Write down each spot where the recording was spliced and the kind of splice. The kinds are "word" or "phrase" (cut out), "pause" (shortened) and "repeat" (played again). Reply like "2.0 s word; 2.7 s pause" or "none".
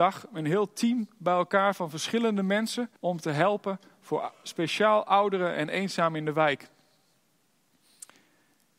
3.0 s pause